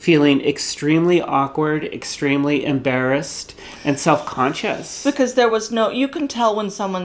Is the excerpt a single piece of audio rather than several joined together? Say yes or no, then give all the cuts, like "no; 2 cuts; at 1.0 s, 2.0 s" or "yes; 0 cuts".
yes; 0 cuts